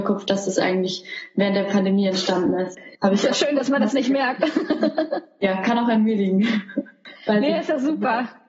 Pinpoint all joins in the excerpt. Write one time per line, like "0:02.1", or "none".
0:02.9